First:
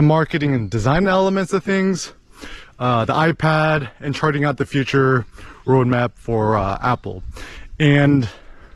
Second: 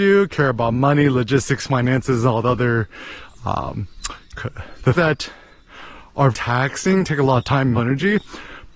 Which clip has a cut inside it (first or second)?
second